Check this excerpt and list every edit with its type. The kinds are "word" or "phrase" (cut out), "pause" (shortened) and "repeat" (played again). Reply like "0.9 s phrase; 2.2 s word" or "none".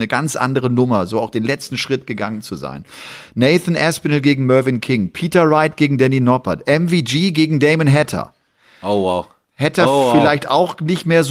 none